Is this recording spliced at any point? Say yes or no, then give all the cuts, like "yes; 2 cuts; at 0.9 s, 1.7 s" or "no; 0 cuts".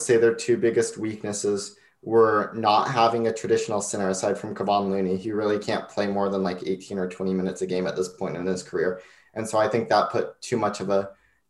no; 0 cuts